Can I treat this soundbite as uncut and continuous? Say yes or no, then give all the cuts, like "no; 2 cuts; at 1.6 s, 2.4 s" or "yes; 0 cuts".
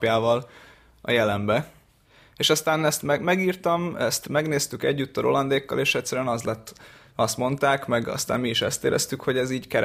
yes; 0 cuts